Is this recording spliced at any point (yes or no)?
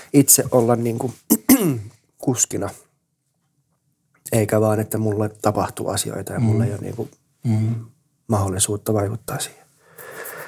no